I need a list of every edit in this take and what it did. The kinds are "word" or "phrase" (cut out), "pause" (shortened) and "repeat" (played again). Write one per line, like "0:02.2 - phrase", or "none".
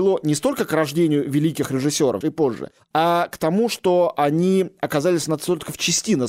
0:02.2 - phrase

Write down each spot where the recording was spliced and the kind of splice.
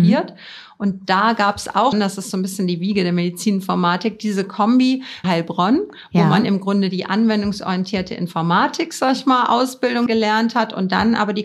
0:01.9 - word
0:05.2 - word
0:10.1 - word

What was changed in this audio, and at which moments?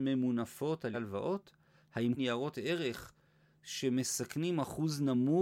0:00.9 - word
0:02.2 - word

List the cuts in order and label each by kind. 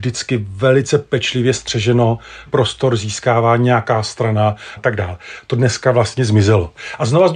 0:02.5 - word
0:04.8 - phrase

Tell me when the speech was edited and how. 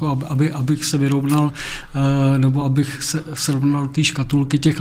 none

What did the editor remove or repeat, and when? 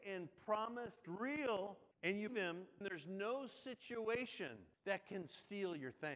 0:01.0 - word
0:01.9 - pause
0:02.3 - word
0:02.8 - word
0:04.7 - pause

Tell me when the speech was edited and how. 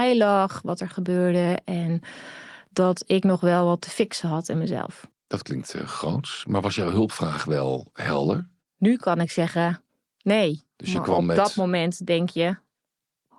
none

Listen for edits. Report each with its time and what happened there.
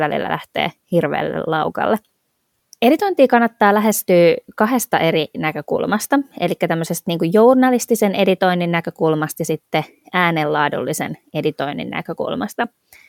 none

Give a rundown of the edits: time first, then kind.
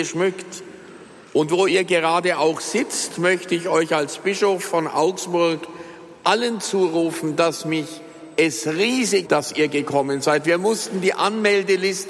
0:09.2 - word

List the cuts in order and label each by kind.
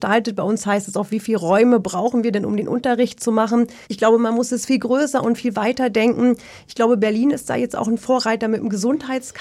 0:03.8 - pause

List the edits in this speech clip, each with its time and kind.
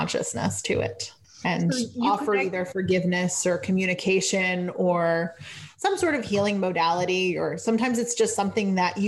0:01.2 - pause

